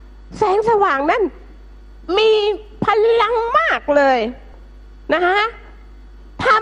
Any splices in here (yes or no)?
no